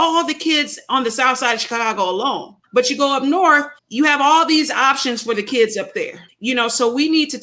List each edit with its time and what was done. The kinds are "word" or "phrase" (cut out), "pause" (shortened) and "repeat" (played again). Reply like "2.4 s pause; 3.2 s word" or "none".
2.6 s pause; 3.8 s pause; 6.3 s pause